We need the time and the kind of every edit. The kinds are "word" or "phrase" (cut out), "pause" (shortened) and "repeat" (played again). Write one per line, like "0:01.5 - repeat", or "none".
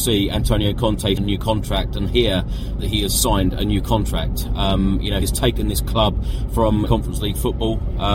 0:01.2 - word
0:02.8 - word
0:05.2 - word
0:06.9 - word